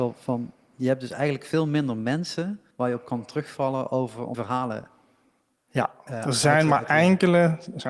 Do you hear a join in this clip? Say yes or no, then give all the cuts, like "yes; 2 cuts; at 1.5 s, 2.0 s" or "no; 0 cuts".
yes; 2 cuts; at 2.7 s, 4.3 s